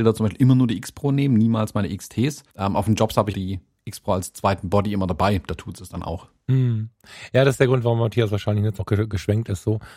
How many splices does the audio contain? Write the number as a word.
three